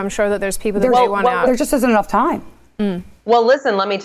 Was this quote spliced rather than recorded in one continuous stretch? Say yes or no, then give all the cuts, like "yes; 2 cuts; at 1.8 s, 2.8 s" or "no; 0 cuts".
no; 0 cuts